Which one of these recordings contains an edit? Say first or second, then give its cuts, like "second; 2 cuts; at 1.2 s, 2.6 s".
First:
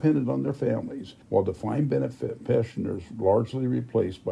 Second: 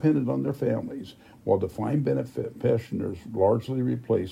first; 1 cut; at 1.2 s